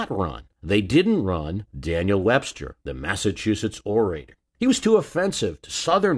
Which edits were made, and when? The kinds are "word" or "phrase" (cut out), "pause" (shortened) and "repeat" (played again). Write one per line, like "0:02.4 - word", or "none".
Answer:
0:01.7 - pause
0:02.8 - pause
0:04.5 - pause